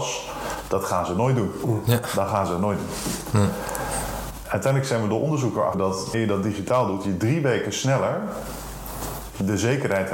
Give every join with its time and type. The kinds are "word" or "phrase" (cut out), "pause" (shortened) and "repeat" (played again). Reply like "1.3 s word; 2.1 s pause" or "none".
5.7 s word; 6.1 s word